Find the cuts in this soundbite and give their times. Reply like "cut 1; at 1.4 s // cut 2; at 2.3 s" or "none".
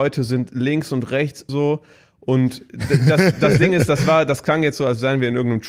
cut 1; at 1.5 s